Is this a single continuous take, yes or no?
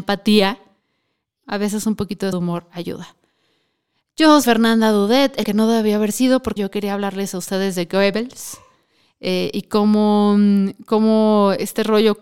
no